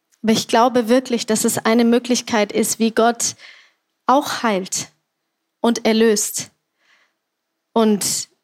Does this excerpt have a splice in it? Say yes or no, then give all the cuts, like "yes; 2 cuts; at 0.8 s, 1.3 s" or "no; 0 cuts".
no; 0 cuts